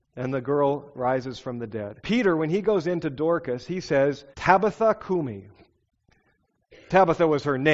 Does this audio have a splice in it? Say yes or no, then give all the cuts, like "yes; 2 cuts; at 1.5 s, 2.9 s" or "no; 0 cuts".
yes; 2 cuts; at 2.0 s, 4.3 s